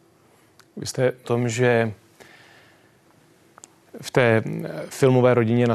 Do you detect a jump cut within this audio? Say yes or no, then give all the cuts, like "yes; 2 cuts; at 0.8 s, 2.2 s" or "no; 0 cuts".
yes; 1 cut; at 1.2 s